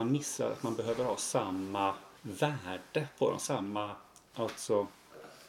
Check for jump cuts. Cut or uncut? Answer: cut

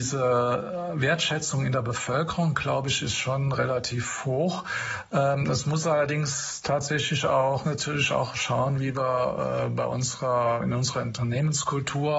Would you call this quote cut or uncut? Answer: cut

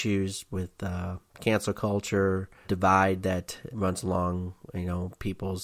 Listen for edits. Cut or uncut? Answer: cut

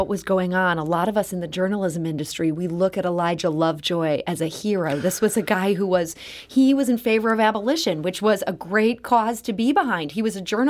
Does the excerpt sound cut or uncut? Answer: uncut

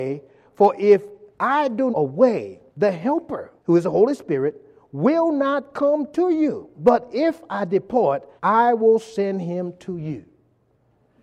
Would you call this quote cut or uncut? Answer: cut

